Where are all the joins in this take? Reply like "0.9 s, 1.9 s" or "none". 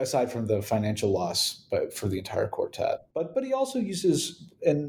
none